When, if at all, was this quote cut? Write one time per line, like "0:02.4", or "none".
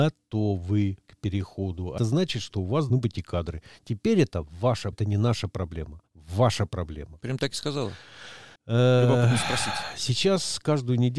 0:02.0
0:02.9
0:04.9
0:06.1
0:08.6